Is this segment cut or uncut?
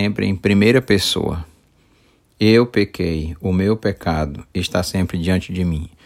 uncut